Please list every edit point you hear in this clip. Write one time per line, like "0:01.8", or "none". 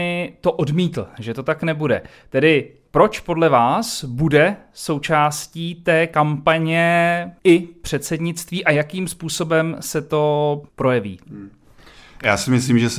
0:07.4
0:10.7